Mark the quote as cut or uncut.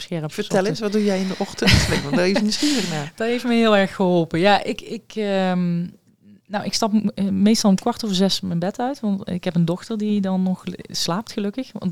uncut